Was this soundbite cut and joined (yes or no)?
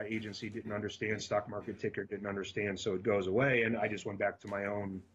no